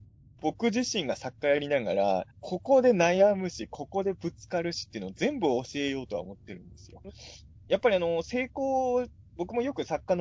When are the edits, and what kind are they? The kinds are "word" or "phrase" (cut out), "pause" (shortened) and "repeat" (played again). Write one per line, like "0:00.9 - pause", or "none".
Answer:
0:02.3 - pause